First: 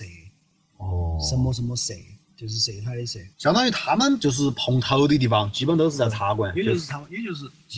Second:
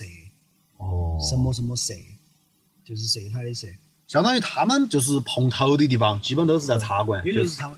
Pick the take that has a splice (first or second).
first